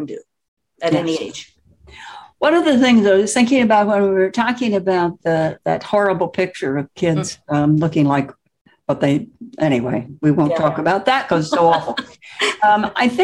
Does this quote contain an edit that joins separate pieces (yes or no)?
no